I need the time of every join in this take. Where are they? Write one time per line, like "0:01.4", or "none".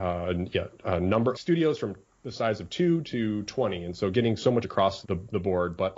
0:01.3
0:04.6
0:05.0